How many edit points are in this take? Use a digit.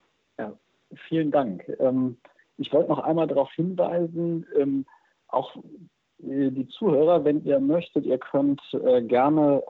0